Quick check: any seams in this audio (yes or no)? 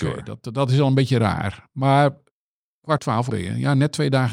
yes